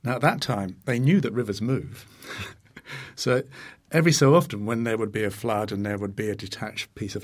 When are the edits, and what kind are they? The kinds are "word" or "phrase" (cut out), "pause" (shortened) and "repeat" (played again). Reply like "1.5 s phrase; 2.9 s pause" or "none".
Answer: none